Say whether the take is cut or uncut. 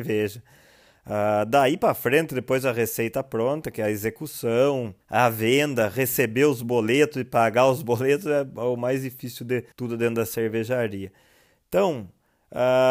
cut